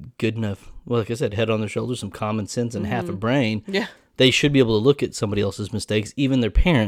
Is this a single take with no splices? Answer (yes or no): yes